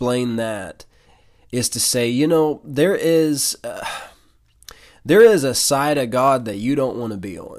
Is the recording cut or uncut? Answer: uncut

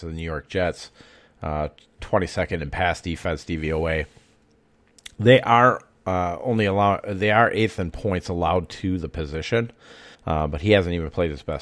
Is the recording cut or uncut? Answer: cut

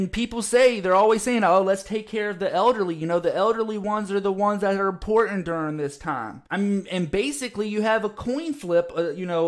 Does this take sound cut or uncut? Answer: cut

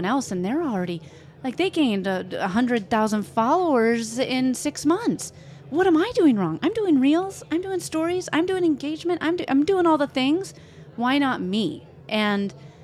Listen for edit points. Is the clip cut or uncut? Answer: uncut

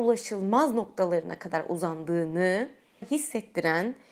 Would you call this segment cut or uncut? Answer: cut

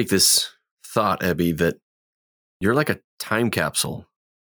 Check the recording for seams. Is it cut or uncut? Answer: uncut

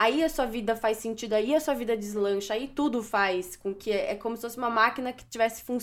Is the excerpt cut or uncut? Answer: uncut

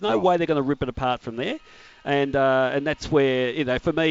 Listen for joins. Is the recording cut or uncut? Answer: uncut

